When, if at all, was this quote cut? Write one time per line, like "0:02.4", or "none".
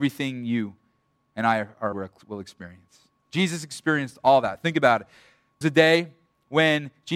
0:01.9
0:05.6